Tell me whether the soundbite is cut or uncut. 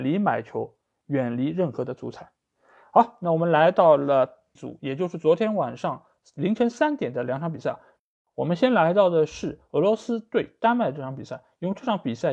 cut